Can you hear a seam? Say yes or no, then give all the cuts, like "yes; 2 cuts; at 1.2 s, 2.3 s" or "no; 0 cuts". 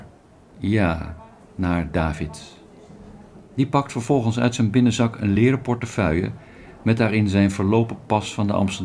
no; 0 cuts